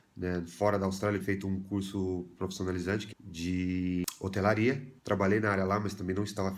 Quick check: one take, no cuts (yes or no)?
no